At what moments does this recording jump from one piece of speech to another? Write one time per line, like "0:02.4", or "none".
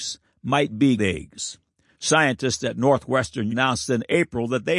0:01.0
0:03.5